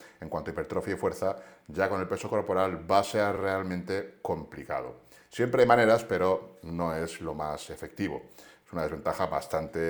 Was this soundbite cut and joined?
no; 0 cuts

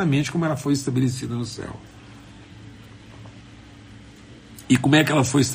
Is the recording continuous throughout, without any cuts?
yes; 0 cuts

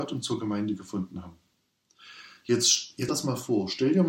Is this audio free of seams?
no; 1 cut; at 3.1 s

